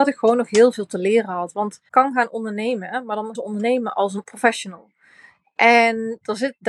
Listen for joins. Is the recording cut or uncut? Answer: cut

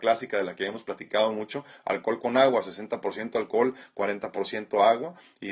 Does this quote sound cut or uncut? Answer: uncut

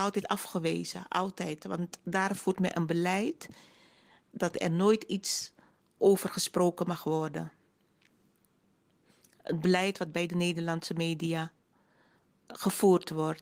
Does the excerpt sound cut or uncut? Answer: uncut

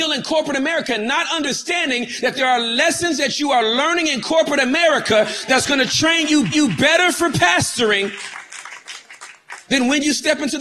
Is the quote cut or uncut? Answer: cut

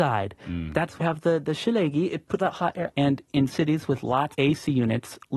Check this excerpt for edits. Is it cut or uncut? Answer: cut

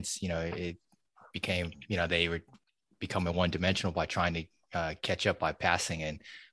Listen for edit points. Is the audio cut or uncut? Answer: uncut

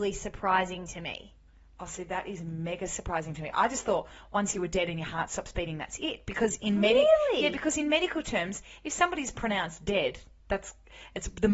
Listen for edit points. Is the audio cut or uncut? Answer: uncut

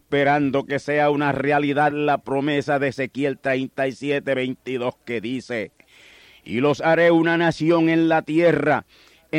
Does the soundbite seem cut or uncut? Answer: uncut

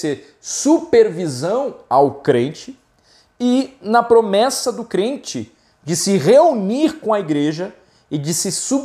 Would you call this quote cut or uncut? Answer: uncut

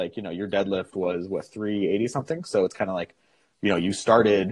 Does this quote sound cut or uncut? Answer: uncut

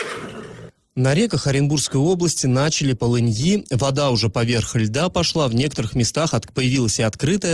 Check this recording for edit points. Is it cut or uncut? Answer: cut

